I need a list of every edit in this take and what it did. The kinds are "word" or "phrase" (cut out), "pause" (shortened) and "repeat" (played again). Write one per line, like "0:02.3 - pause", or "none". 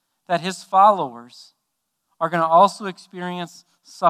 none